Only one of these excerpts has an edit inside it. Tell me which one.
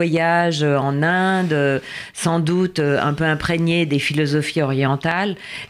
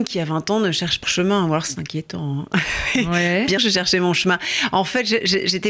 second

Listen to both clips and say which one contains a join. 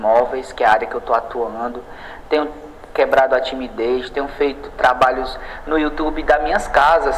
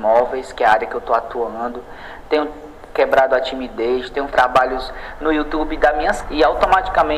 second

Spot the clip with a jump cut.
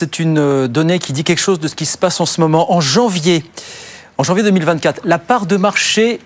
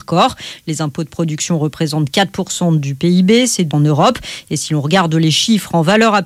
second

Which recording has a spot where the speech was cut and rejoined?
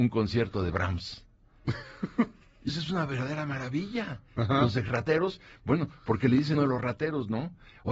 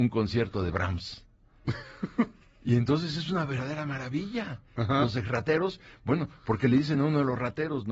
first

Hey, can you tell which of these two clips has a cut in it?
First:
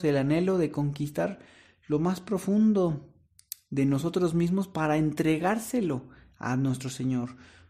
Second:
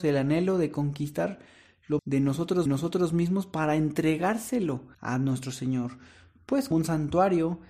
second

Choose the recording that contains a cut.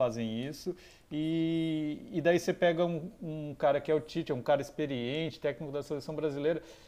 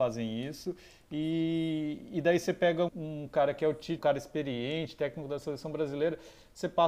second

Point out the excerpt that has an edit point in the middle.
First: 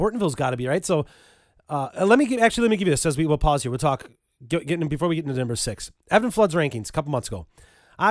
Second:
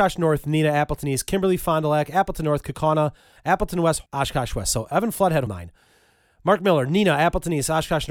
second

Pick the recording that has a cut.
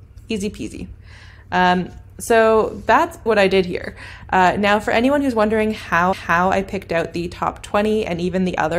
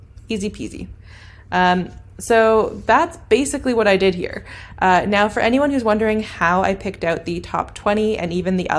first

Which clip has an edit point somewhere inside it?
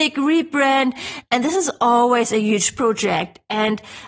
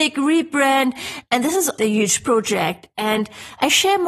second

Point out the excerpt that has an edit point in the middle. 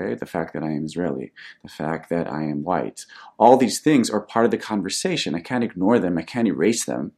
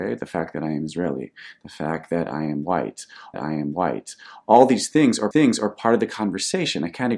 second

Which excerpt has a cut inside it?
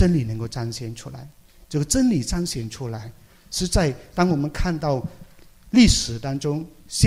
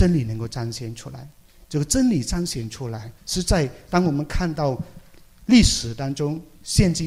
second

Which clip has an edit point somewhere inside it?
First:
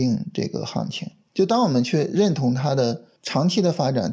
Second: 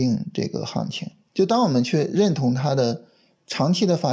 first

